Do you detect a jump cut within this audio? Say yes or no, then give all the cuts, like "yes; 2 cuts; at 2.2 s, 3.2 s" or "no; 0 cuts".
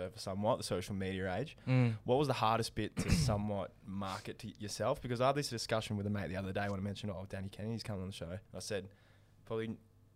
yes; 1 cut; at 8.5 s